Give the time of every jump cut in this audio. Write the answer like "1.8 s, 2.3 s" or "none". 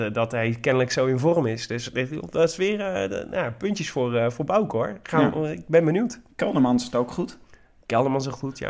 none